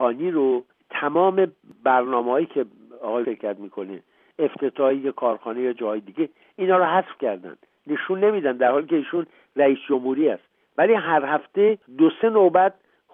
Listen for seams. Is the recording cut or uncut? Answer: cut